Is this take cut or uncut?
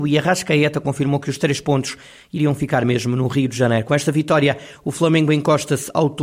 uncut